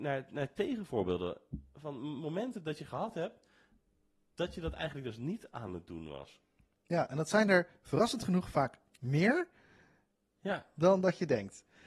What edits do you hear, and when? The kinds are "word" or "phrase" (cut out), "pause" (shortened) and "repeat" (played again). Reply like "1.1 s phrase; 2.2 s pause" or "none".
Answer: none